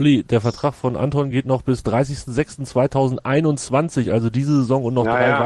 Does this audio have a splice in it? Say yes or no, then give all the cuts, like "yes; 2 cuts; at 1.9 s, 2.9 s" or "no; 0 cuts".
no; 0 cuts